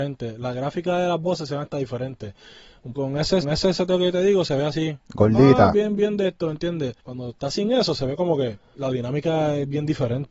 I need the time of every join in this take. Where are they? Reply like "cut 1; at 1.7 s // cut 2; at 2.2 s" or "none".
cut 1; at 2.9 s // cut 2; at 3.4 s // cut 3; at 5.0 s // cut 4; at 5.7 s // cut 5; at 7.0 s // cut 6; at 8.7 s